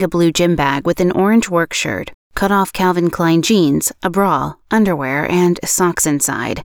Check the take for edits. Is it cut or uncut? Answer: uncut